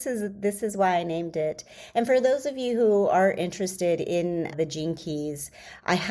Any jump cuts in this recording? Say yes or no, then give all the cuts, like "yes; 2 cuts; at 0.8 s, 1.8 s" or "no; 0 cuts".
yes; 1 cut; at 4.5 s